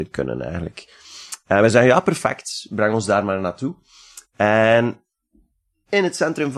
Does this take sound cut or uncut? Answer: uncut